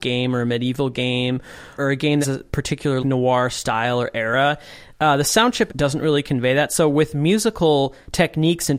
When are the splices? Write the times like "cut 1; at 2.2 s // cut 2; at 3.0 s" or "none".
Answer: cut 1; at 1.8 s // cut 2; at 2.2 s // cut 3; at 3.0 s // cut 4; at 5.7 s